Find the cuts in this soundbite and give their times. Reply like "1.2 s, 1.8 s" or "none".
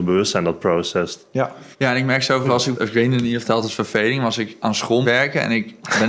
1.7 s, 2.4 s, 2.7 s, 3.4 s, 5.0 s